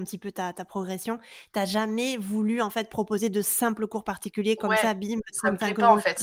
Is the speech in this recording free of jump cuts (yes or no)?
yes